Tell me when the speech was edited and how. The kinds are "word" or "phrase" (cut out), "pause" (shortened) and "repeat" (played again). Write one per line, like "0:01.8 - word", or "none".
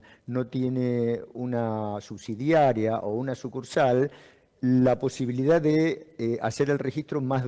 none